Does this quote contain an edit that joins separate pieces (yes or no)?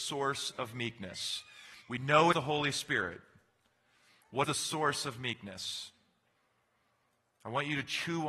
yes